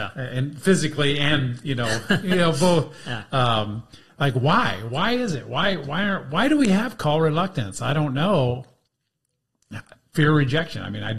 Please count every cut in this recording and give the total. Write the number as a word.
zero